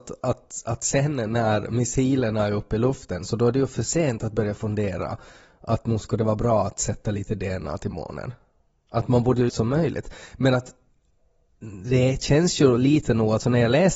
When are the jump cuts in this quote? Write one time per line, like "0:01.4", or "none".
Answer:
0:09.5